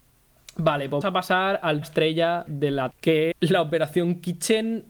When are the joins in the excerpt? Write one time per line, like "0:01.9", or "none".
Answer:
0:01.0
0:01.8
0:02.5
0:02.9
0:03.3